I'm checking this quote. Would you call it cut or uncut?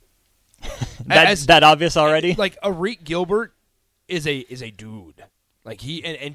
uncut